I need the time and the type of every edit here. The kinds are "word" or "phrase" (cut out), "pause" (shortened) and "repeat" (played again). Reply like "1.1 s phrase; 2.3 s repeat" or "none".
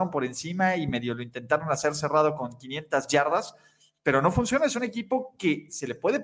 none